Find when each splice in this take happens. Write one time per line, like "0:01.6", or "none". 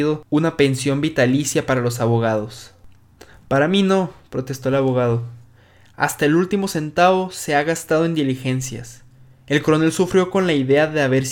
none